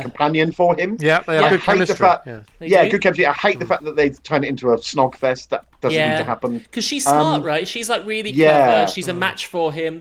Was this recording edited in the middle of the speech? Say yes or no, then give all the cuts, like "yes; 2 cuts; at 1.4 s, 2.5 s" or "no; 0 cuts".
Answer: no; 0 cuts